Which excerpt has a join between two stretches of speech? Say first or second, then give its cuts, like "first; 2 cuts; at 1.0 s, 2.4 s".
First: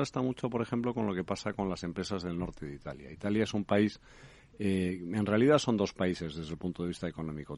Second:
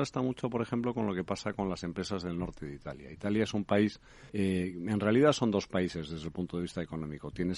second; 1 cut; at 4.3 s